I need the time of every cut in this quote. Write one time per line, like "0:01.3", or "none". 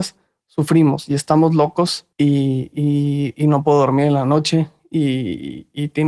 0:02.1